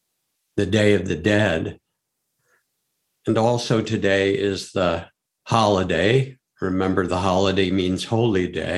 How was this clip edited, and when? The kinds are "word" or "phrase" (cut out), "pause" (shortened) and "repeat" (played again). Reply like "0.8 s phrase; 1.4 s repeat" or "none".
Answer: none